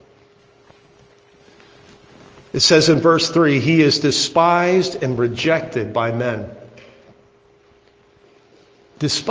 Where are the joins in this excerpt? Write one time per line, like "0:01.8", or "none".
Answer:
none